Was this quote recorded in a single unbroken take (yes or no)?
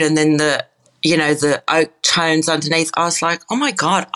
yes